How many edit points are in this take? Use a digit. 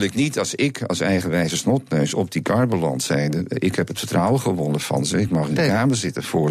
0